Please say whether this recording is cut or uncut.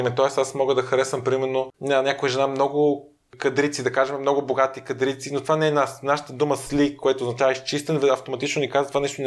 cut